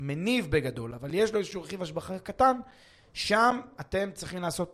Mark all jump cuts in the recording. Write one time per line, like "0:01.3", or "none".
none